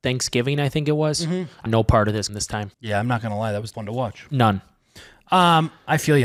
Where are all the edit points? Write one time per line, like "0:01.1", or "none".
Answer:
0:01.7
0:02.3
0:02.7
0:03.7